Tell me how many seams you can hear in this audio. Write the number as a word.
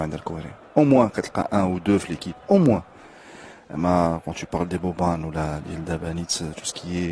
zero